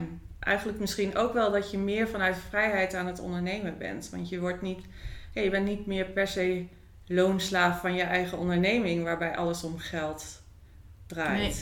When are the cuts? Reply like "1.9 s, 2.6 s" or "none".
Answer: none